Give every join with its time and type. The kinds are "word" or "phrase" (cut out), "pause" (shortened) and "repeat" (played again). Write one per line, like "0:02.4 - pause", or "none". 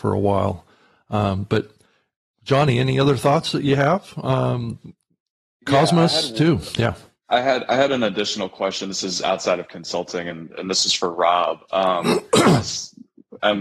none